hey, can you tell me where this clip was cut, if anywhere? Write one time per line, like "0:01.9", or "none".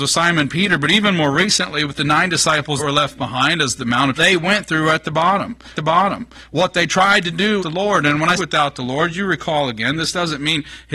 0:02.8
0:04.1
0:05.7
0:07.6
0:08.4